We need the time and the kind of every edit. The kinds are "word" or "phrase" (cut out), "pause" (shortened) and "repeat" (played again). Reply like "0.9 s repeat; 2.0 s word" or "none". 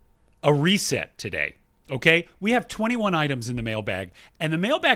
none